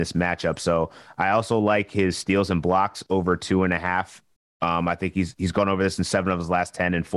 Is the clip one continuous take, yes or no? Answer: yes